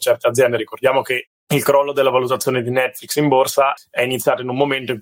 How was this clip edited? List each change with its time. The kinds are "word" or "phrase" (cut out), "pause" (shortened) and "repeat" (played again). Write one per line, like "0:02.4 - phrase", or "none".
0:03.8 - word